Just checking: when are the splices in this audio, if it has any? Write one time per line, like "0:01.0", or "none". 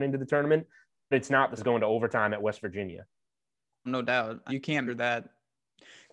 0:01.1
0:01.6
0:03.9
0:04.5
0:04.9